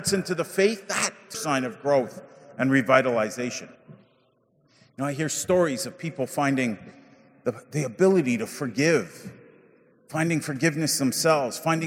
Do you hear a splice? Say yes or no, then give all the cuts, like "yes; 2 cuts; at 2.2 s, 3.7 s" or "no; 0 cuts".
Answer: yes; 2 cuts; at 1.3 s, 3.7 s